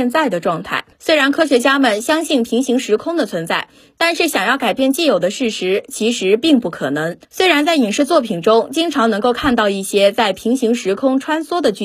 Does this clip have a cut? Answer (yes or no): yes